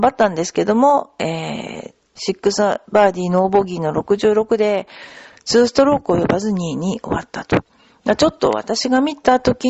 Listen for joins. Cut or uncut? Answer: cut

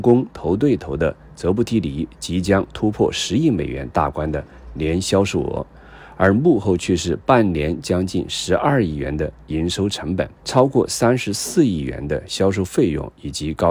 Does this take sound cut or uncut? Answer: cut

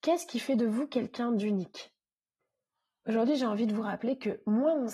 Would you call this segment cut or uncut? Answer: uncut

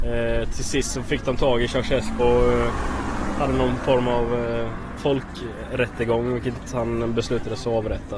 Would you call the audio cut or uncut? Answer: cut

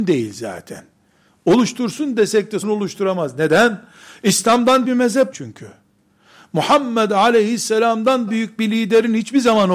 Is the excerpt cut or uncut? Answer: cut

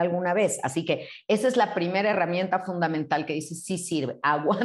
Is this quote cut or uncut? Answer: uncut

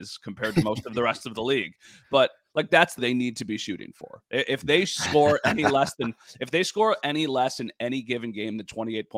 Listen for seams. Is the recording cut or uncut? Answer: cut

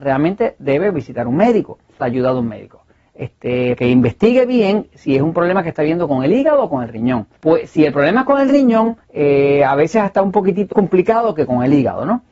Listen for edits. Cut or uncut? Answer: cut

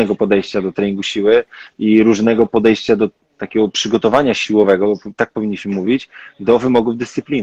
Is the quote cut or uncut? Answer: uncut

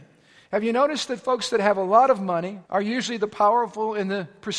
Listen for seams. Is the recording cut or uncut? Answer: cut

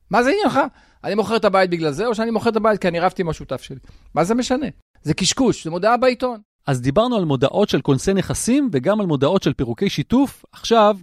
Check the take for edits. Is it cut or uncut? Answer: uncut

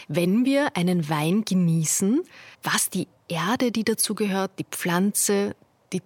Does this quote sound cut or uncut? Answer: cut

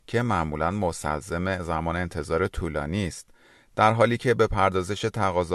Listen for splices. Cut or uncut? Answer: uncut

